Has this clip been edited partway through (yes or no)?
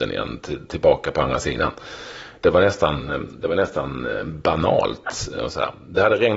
no